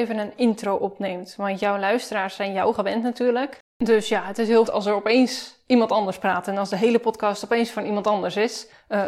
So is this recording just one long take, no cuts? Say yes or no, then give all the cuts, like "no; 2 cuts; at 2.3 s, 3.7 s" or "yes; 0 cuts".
no; 2 cuts; at 3.7 s, 4.7 s